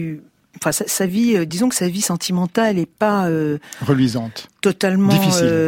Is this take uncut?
yes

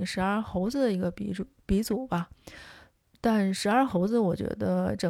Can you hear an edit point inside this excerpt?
no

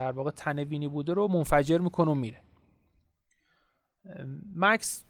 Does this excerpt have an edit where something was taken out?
no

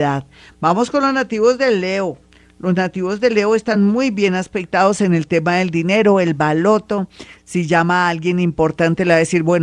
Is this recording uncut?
yes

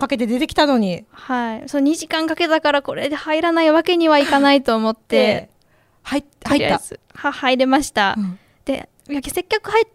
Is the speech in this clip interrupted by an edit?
no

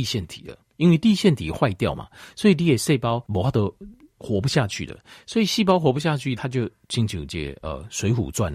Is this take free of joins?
no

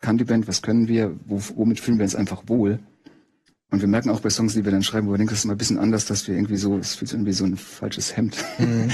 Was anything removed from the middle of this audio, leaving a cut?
no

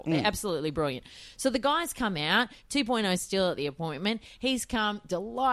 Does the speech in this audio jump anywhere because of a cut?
no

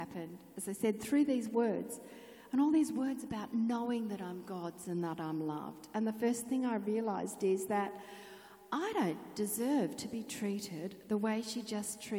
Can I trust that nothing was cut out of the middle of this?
yes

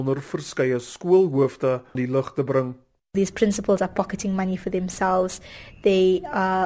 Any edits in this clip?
yes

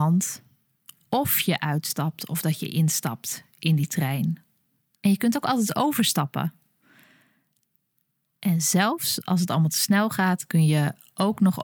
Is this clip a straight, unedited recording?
yes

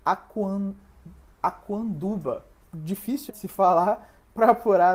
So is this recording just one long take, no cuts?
no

